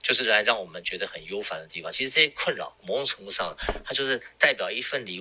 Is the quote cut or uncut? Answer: cut